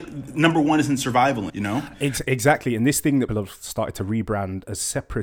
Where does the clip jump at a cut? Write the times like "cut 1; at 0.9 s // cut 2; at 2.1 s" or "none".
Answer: cut 1; at 1.5 s // cut 2; at 3.3 s